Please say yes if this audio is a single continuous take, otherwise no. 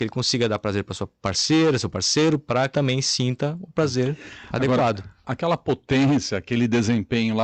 no